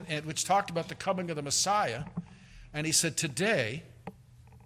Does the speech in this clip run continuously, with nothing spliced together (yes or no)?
yes